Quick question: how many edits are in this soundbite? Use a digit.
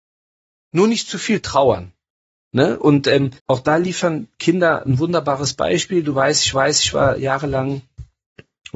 2